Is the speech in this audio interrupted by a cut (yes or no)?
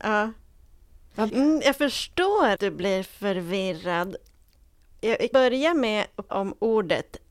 yes